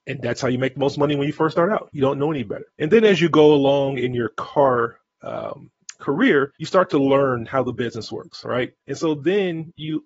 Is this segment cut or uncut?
cut